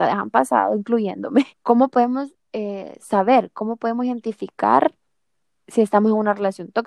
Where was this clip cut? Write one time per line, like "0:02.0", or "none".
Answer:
0:01.5
0:02.4